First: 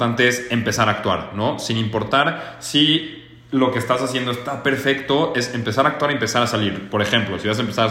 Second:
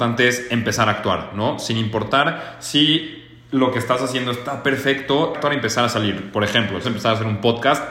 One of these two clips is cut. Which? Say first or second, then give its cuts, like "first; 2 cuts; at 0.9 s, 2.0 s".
second; 2 cuts; at 5.3 s, 6.8 s